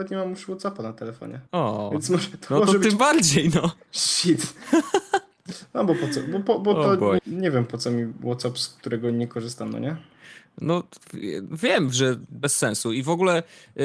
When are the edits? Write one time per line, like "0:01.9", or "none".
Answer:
0:01.5
0:07.2